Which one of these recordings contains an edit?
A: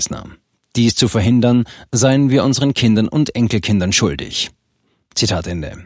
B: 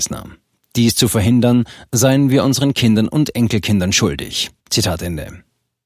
B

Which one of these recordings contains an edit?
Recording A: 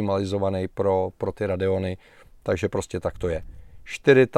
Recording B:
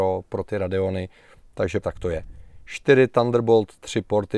B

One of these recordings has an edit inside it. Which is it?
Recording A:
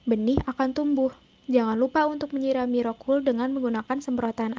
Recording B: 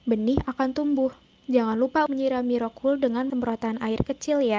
B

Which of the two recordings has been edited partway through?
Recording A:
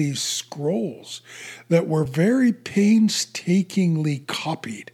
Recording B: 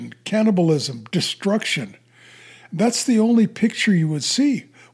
B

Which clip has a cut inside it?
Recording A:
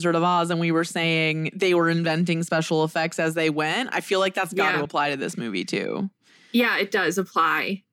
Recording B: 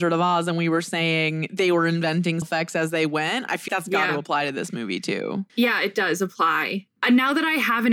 B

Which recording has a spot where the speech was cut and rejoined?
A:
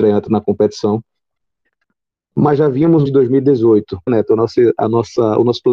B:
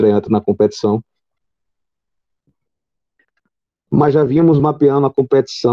A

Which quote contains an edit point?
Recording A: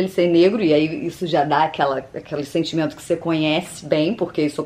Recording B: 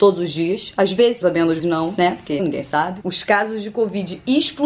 B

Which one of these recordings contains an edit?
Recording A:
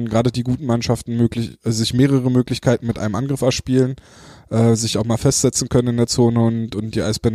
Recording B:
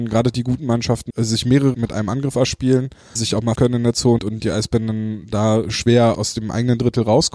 B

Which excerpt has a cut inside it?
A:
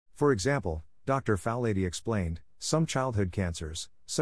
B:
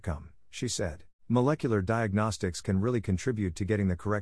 B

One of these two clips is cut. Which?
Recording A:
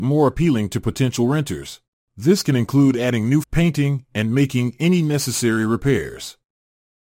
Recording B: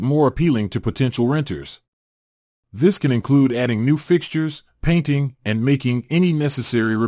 A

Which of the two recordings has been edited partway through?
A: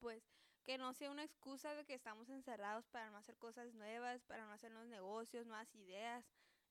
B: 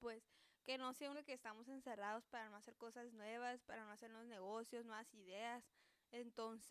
B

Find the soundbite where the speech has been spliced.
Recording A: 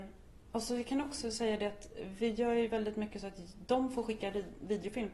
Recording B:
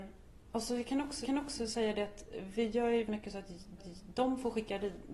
B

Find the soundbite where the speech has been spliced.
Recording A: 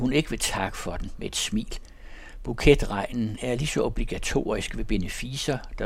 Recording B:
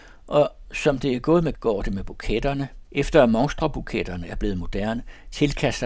B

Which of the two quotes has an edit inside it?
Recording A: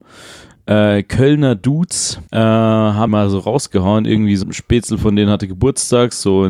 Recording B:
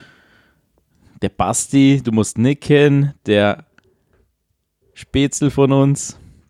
A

